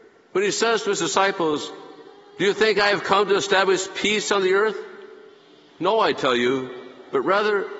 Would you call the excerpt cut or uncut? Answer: uncut